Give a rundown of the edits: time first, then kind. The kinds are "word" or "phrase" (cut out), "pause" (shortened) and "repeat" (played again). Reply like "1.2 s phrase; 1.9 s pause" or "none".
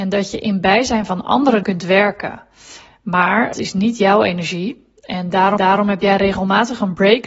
1.6 s phrase; 3.5 s word; 5.6 s repeat